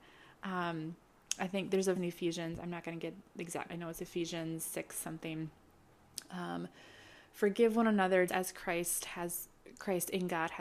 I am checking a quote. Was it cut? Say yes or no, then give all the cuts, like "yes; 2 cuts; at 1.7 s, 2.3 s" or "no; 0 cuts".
yes; 3 cuts; at 2.0 s, 3.7 s, 8.3 s